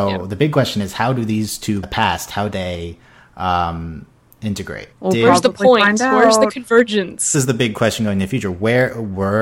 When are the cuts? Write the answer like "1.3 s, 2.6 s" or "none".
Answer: 1.8 s, 2.5 s, 4.9 s, 7.3 s